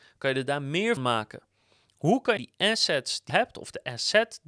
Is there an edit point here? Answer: yes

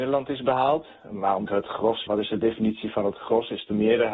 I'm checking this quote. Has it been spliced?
yes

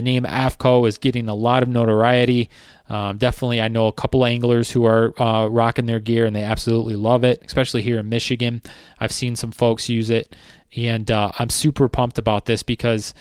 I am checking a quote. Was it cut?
no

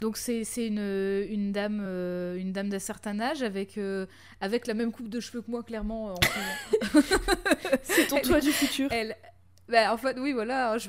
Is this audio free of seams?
yes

